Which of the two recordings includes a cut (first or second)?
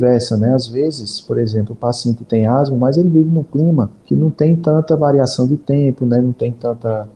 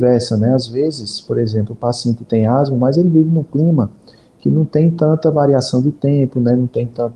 first